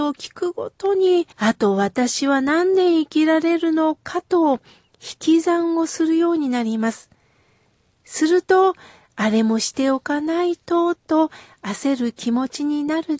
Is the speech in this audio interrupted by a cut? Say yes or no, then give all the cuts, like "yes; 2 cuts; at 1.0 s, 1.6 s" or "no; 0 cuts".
yes; 1 cut; at 1.3 s